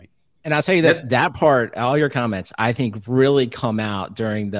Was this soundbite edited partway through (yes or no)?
no